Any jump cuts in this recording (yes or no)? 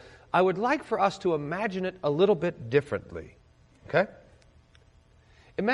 no